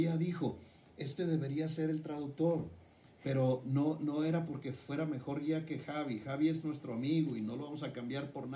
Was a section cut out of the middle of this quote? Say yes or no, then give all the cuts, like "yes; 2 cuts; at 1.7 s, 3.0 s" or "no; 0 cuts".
no; 0 cuts